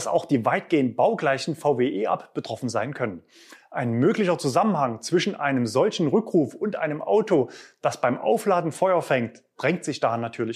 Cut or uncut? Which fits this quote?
uncut